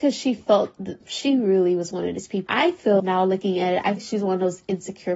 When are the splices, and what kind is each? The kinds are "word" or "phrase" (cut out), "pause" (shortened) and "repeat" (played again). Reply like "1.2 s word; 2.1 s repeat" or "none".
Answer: 1.0 s word; 2.5 s word; 3.0 s word; 4.0 s word